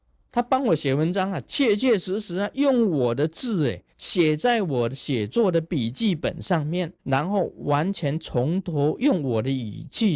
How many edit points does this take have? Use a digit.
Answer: 2